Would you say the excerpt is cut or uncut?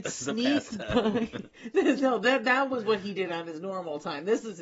uncut